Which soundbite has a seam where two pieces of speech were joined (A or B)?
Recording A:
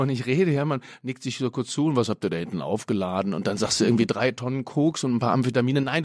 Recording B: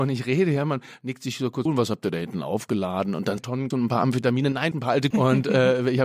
B